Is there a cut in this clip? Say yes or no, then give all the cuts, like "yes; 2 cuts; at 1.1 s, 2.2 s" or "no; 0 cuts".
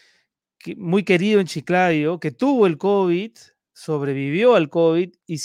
no; 0 cuts